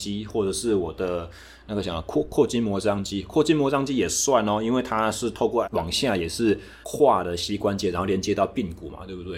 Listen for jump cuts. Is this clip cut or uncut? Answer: cut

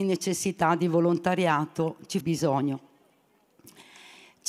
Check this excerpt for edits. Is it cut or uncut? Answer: cut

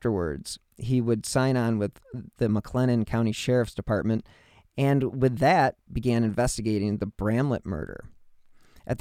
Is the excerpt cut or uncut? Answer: uncut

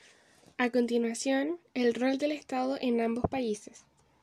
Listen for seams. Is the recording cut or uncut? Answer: uncut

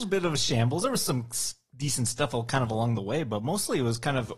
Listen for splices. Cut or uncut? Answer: uncut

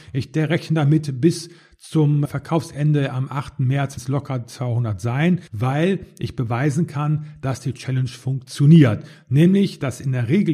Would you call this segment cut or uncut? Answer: cut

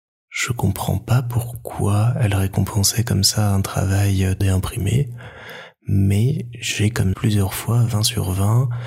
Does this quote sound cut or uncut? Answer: cut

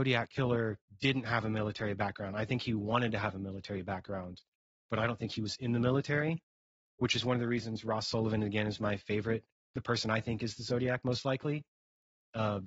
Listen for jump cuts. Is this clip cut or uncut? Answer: uncut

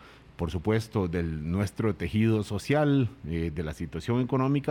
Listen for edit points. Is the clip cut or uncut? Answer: uncut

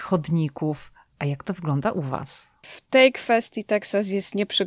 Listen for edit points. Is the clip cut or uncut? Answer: uncut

